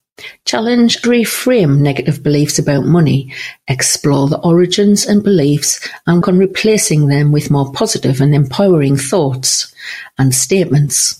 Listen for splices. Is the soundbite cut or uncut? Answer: cut